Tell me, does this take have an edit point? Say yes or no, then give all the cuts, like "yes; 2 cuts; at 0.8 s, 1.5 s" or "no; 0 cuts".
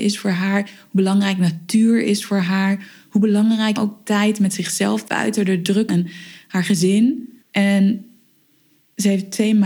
yes; 4 cuts; at 3.8 s, 5.1 s, 5.9 s, 7.4 s